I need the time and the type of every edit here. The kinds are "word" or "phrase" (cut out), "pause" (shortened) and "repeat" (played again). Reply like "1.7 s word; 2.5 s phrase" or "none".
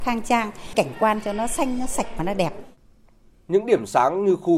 none